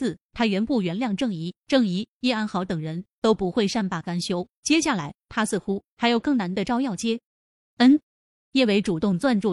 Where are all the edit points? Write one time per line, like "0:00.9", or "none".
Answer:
0:07.3
0:08.0

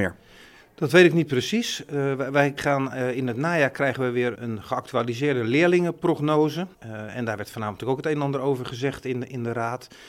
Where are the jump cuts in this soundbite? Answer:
0:02.6
0:04.3
0:06.7

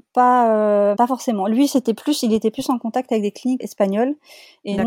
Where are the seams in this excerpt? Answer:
0:00.9
0:03.6

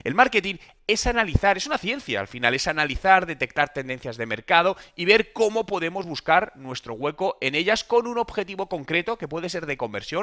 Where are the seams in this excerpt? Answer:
none

